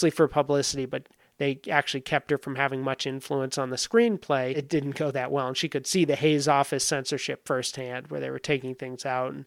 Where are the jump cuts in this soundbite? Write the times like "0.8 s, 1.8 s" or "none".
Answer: none